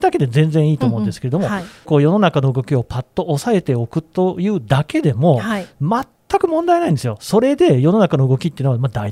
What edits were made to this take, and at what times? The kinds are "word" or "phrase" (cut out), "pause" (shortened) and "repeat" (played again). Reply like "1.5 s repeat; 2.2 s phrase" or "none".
1.8 s phrase